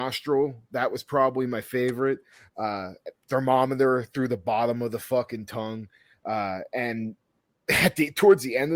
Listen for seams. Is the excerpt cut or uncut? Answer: uncut